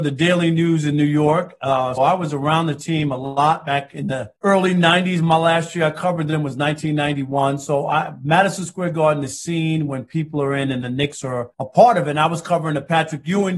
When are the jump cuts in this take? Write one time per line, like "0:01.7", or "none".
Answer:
0:02.0
0:04.4
0:11.5